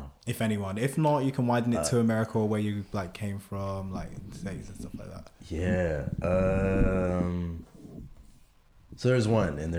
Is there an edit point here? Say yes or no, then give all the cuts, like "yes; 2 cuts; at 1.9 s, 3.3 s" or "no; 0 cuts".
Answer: no; 0 cuts